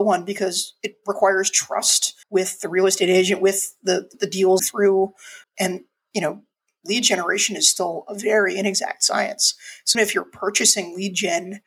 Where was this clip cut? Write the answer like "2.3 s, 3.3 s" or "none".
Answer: 2.2 s, 4.1 s, 4.6 s, 5.4 s, 9.9 s